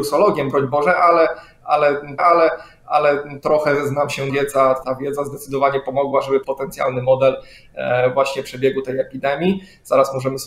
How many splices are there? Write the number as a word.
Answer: four